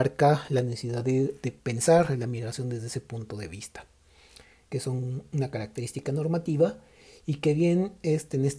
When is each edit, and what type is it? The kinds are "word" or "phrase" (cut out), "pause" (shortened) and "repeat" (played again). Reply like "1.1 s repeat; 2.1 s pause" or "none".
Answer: none